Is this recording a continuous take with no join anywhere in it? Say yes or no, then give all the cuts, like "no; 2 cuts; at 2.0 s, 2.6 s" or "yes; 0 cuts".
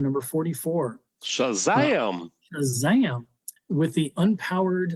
no; 1 cut; at 3.6 s